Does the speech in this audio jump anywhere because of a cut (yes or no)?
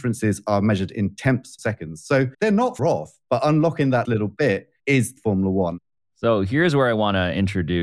yes